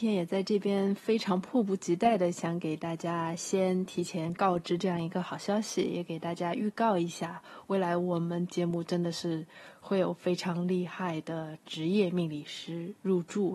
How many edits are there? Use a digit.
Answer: 0